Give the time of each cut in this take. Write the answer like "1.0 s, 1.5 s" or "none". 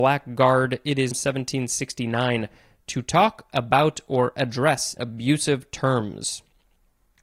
1.1 s, 5.0 s